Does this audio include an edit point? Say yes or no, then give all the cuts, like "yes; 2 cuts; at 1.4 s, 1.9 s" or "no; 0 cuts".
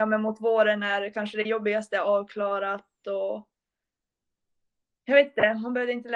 no; 0 cuts